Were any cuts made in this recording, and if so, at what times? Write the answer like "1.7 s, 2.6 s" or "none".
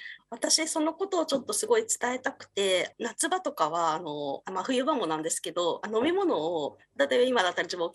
none